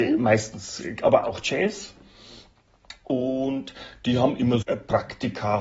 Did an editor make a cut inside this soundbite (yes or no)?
yes